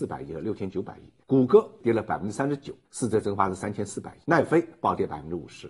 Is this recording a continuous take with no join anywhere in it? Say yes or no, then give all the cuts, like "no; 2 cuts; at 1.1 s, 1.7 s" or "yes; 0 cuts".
no; 3 cuts; at 1.2 s, 2.8 s, 4.2 s